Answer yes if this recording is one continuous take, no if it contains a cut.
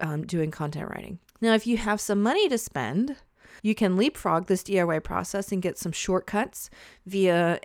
no